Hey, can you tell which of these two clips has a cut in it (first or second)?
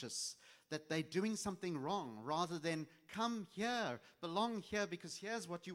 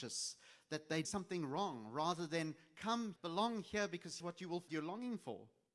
second